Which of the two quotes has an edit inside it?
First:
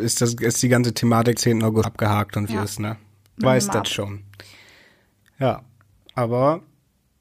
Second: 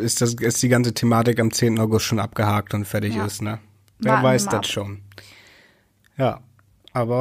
first; 4 cuts; at 1.3 s, 1.8 s, 2.5 s, 3.4 s

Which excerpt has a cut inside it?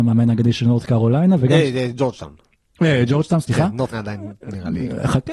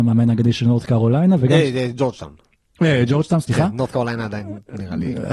first; 1 cut; at 3.9 s

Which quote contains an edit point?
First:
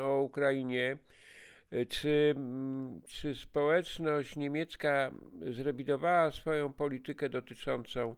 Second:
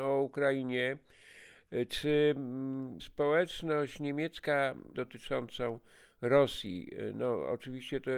second; 2 cuts; at 3.0 s, 4.9 s

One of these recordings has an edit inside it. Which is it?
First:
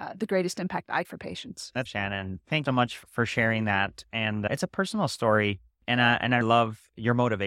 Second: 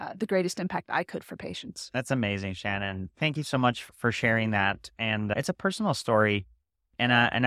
first; 5 cuts; at 1.0 s, 1.9 s, 2.7 s, 5.7 s, 6.4 s

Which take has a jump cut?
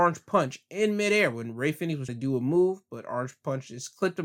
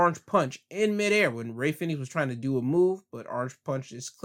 first; 1 cut; at 2.1 s

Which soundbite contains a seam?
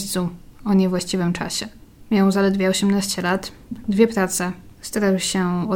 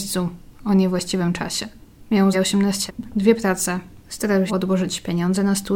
second; 3 cuts; at 2.3 s, 2.9 s, 4.5 s

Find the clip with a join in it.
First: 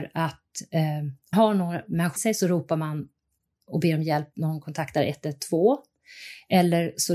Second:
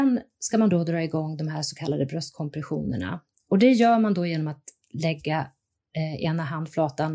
first; 3 cuts; at 1.3 s, 2.2 s, 4.3 s

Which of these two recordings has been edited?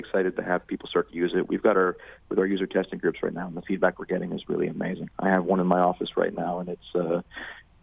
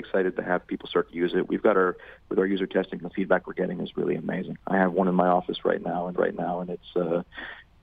second; 2 cuts; at 3.0 s, 6.1 s

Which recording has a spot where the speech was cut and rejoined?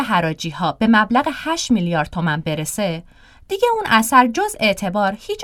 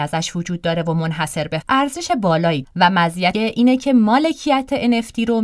second; 3 cuts; at 1.6 s, 2.6 s, 3.3 s

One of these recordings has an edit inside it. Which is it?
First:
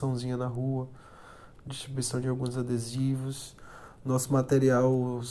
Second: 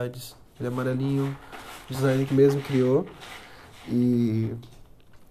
second; 1 cut; at 2.3 s

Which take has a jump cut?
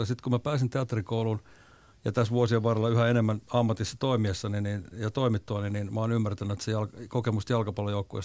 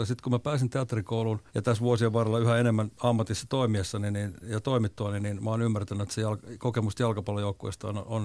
second; 1 cut; at 1.5 s

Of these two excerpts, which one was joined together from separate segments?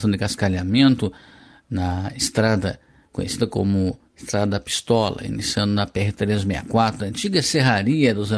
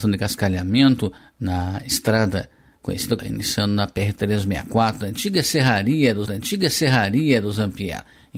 second; 3 cuts; at 1.2 s, 3.2 s, 6.3 s

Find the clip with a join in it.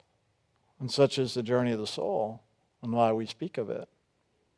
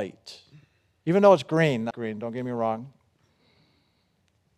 second; 1 cut; at 1.9 s

